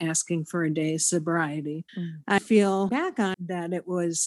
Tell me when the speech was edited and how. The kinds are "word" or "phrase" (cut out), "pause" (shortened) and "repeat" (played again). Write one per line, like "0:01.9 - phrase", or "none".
0:01.9 - pause
0:02.4 - word
0:02.9 - word
0:03.3 - word

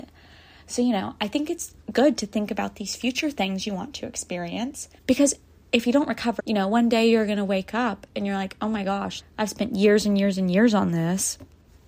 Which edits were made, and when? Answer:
0:05.0 - pause
0:06.4 - word
0:09.2 - word

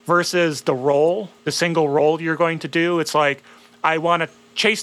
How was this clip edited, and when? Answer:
0:01.4 - pause

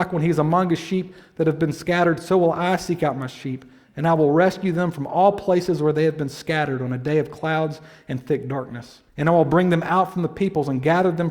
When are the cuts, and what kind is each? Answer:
0:09.1 - pause

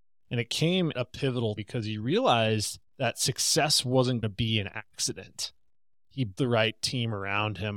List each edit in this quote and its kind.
0:00.9 - word
0:01.6 - word
0:02.9 - pause
0:04.2 - word
0:06.4 - word

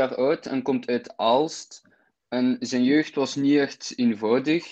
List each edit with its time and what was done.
none

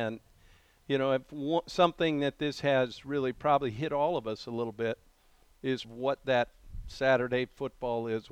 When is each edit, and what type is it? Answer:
0:05.8 - phrase

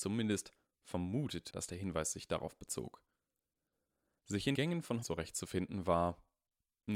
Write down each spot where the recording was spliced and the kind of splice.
0:01.5 - word
0:04.5 - word
0:05.0 - word

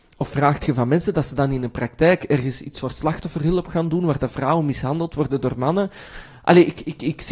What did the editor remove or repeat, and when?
none

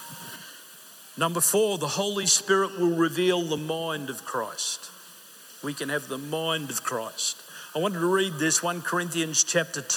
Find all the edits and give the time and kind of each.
none

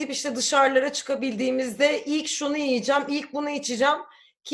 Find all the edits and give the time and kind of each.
none

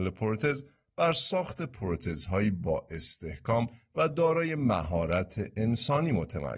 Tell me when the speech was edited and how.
none

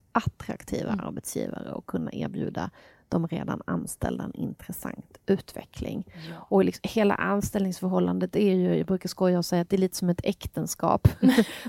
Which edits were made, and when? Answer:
none

